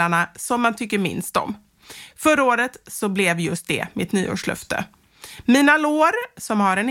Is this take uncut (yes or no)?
yes